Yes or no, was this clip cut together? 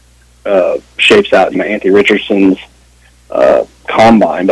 yes